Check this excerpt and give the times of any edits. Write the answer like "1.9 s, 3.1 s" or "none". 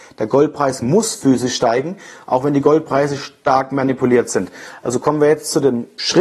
none